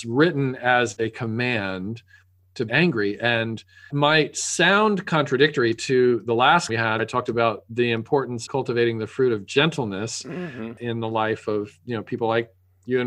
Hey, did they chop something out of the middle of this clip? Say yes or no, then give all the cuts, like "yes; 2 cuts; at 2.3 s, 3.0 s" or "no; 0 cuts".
yes; 5 cuts; at 2.7 s, 3.9 s, 6.7 s, 7.0 s, 8.5 s